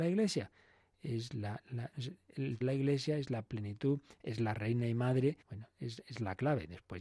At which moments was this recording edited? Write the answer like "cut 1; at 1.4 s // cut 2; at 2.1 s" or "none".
cut 1; at 1.9 s // cut 2; at 2.6 s // cut 3; at 5.4 s